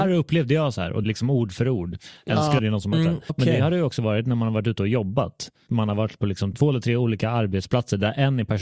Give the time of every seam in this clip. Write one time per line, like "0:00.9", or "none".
0:01.0
0:02.6
0:02.9
0:03.3
0:05.7
0:06.5